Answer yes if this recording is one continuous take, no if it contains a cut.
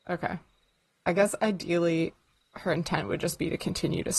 yes